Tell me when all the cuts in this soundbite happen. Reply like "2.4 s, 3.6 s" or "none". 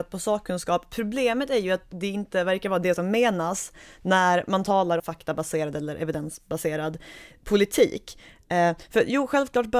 5.0 s